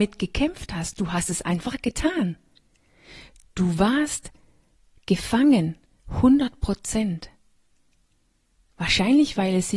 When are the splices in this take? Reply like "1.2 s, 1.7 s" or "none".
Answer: none